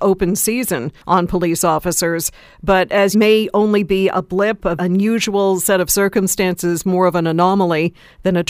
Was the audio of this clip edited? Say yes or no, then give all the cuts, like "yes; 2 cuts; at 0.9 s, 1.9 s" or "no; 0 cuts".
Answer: yes; 3 cuts; at 1.0 s, 3.1 s, 4.8 s